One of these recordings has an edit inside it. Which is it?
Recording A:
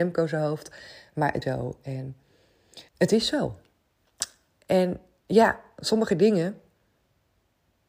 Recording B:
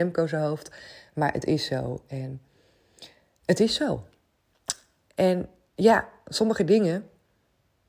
A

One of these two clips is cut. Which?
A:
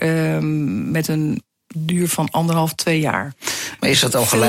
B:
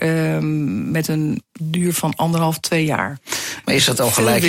B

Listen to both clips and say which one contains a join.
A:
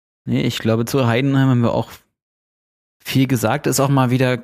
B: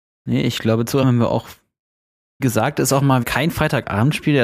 B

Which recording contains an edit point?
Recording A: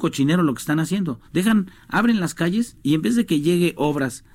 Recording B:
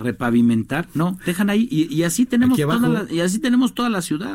A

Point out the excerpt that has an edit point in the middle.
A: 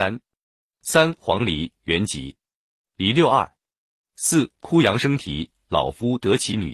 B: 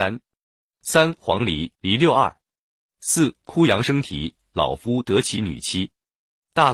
B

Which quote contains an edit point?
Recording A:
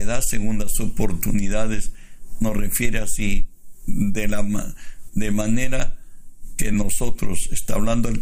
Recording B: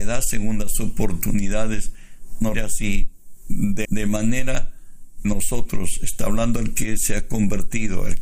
B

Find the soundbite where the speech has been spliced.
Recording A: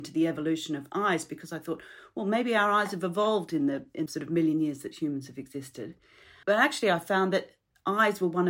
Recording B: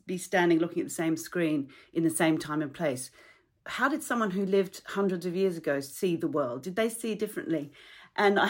A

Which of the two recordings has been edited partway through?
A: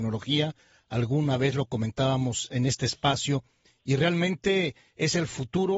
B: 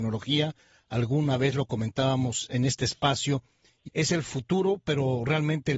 B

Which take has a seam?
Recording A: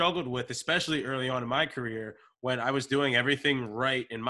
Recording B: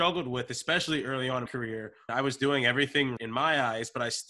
B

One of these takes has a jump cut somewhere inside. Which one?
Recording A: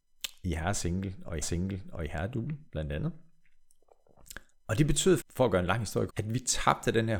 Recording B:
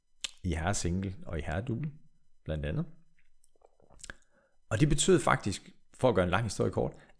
A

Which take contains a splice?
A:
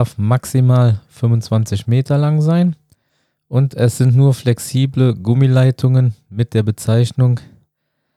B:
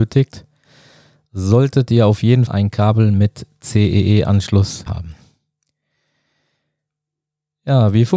B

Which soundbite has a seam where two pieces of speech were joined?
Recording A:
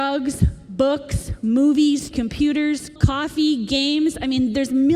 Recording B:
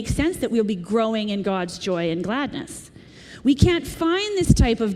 A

